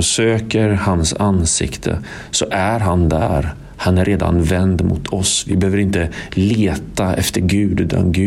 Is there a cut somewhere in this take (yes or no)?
no